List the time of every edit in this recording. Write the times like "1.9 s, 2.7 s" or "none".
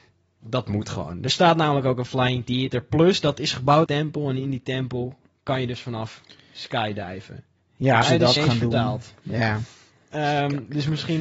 3.9 s, 8.0 s, 8.4 s

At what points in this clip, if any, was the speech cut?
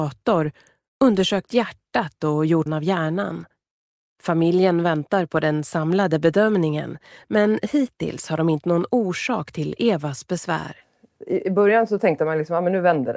2.7 s, 3.8 s, 8.6 s

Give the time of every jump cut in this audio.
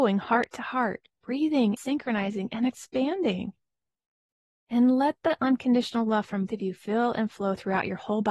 1.8 s, 6.5 s

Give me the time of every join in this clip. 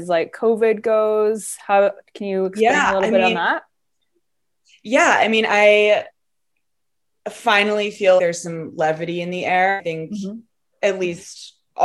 8.2 s

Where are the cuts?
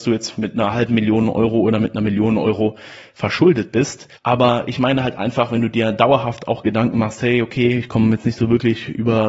4.2 s

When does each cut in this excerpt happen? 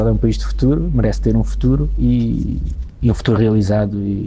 none

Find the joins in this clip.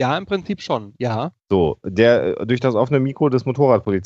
1.4 s

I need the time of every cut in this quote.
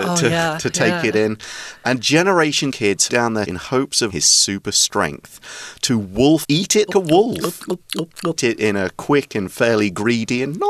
2.7 s, 3.1 s, 3.4 s, 4.1 s, 6.4 s, 6.9 s, 8.4 s

